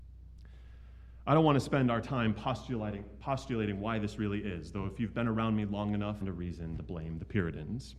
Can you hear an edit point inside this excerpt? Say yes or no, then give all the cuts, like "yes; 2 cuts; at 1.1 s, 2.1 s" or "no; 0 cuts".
yes; 1 cut; at 6.2 s